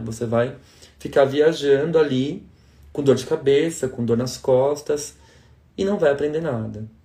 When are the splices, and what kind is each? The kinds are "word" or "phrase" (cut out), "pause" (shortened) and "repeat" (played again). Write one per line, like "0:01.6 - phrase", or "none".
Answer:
none

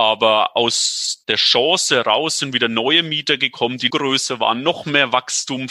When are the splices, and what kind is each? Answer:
0:01.2 - word
0:03.9 - word

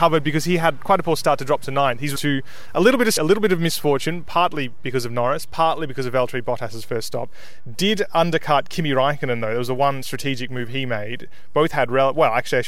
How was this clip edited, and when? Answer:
0:02.2 - phrase
0:03.2 - word

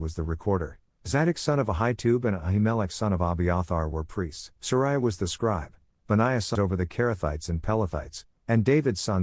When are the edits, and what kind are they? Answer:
0:04.6 - pause
0:06.5 - phrase

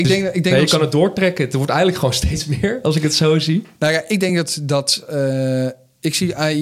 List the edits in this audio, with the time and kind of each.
none

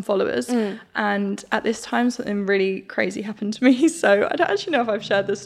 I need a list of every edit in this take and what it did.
none

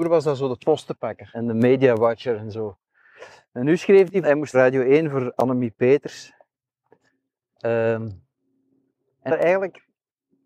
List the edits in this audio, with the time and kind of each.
0:01.3 - word
0:04.2 - word
0:04.5 - phrase
0:09.3 - word

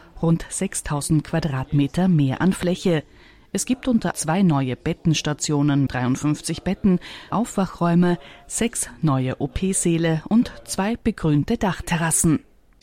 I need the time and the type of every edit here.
0:04.1 - word
0:05.9 - word
0:07.3 - word

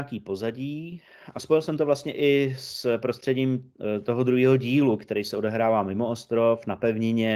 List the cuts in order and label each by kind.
none

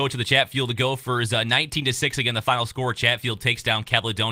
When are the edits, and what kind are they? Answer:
none

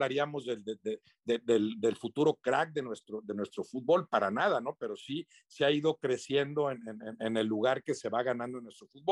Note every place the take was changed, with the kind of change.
none

